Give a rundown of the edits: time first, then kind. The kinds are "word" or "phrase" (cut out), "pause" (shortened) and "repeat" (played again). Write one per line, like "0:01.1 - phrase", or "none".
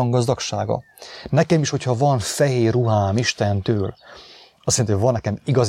none